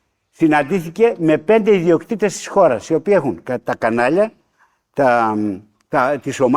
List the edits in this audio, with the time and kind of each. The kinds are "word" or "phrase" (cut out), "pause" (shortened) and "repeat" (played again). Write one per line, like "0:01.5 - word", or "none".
none